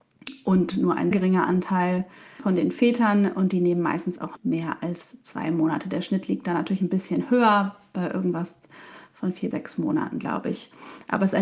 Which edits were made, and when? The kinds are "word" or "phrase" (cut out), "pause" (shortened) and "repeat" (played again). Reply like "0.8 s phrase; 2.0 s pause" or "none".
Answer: 1.1 s word; 2.4 s word; 4.4 s word; 9.5 s word